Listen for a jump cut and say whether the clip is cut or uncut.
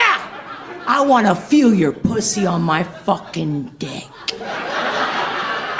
uncut